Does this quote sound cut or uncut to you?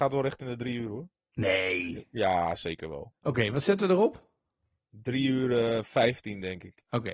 uncut